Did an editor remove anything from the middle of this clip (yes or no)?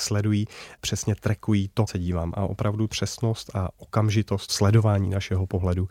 yes